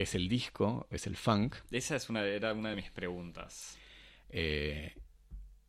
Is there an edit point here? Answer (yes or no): no